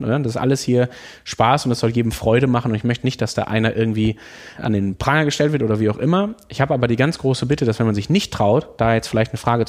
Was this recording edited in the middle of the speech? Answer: yes; 1 cut; at 4.6 s

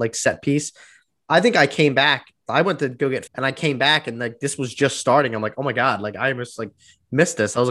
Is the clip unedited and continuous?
no; 1 cut; at 3.3 s

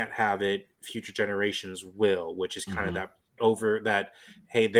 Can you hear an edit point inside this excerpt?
yes; 1 cut; at 3.4 s

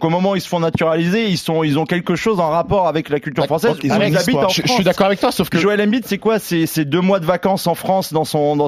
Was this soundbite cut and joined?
no; 0 cuts

